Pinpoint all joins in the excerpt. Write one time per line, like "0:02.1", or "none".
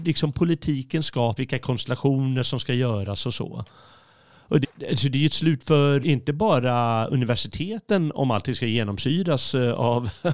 0:01.4
0:04.6
0:06.0